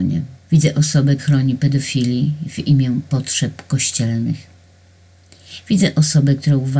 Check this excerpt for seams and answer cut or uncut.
cut